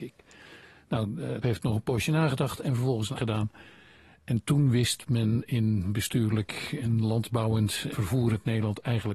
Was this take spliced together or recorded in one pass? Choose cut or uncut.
cut